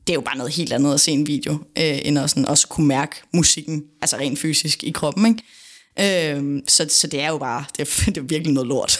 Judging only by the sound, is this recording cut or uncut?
uncut